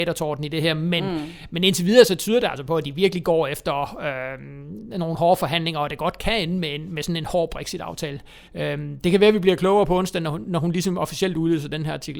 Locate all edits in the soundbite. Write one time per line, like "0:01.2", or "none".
0:08.4